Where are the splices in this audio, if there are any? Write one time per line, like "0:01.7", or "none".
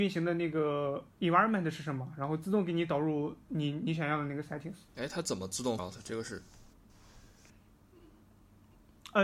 0:04.9
0:05.8